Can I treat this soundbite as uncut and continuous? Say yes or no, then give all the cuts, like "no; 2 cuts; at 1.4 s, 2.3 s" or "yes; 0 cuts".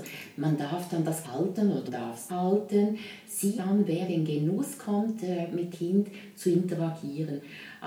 no; 6 cuts; at 1.2 s, 1.9 s, 2.3 s, 3.6 s, 4.1 s, 5.7 s